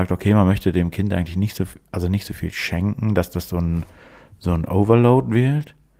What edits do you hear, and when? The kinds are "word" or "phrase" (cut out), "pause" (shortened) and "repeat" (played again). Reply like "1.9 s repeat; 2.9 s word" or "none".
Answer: none